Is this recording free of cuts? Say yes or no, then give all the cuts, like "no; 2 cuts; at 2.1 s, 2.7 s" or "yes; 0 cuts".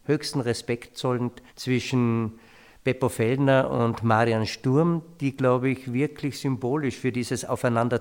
no; 1 cut; at 1.5 s